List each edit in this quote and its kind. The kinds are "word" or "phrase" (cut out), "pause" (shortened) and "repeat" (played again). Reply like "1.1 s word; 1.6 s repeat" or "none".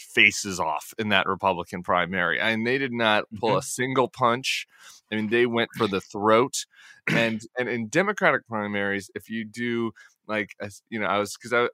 none